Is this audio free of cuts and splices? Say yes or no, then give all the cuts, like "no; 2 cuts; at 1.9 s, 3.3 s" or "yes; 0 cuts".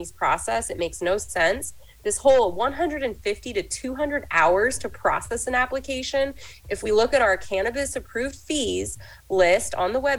yes; 0 cuts